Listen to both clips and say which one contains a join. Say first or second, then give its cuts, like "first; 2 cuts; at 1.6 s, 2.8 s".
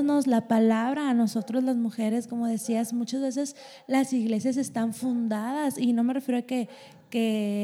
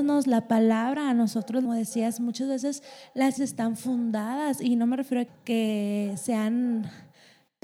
second; 3 cuts; at 1.6 s, 3.4 s, 5.3 s